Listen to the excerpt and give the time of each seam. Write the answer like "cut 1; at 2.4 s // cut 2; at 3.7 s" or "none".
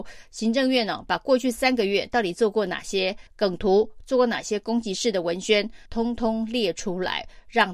cut 1; at 3.3 s // cut 2; at 5.9 s